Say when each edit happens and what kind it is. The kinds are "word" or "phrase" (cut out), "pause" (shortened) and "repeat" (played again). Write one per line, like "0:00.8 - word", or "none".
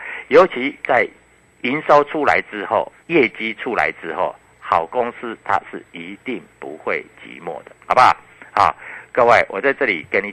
0:03.0 - pause
0:07.8 - pause